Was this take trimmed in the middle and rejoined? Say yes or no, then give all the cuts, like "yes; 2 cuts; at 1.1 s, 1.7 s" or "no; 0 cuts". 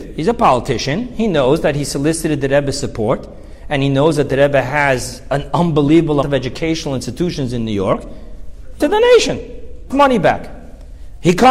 yes; 3 cuts; at 6.2 s, 8.8 s, 9.9 s